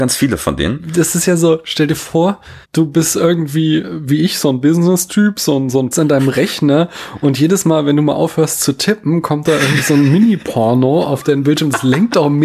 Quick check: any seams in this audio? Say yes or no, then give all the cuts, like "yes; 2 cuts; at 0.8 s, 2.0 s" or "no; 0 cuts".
yes; 2 cuts; at 2.6 s, 5.9 s